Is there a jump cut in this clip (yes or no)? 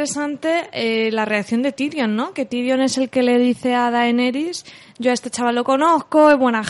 no